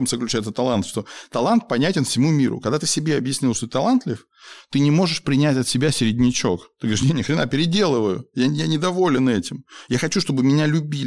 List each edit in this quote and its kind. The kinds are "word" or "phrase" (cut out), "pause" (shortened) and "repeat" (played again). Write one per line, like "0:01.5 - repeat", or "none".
none